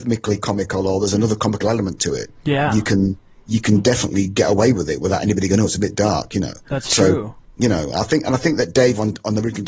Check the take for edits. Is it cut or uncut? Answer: uncut